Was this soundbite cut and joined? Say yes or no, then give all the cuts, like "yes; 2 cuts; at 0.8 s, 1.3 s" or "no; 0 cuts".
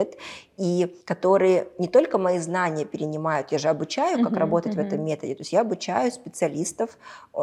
yes; 1 cut; at 1.0 s